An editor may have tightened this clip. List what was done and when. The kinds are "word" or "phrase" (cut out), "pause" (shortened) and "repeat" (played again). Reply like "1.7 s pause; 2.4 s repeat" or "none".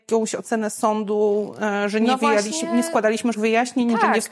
3.3 s word